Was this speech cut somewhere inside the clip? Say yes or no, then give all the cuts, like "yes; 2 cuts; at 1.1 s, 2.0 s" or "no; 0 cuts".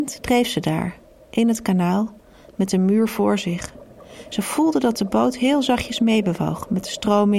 no; 0 cuts